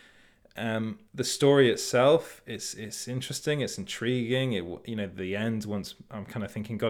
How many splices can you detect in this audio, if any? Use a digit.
1